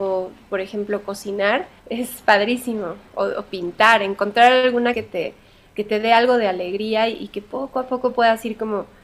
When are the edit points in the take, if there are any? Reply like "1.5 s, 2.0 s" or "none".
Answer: 1.8 s, 4.9 s, 5.7 s